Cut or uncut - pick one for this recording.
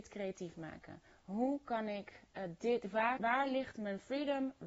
cut